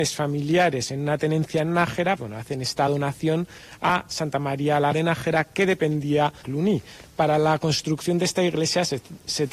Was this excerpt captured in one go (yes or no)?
no